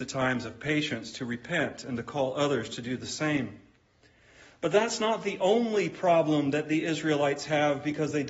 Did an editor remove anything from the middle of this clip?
no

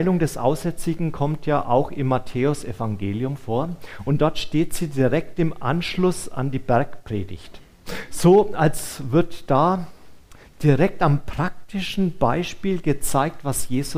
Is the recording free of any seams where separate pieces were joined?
yes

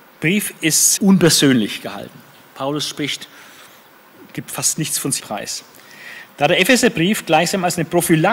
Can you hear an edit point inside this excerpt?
yes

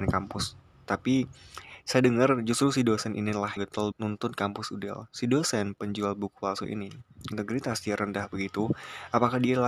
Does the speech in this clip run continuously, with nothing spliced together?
no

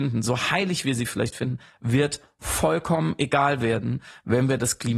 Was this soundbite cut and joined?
no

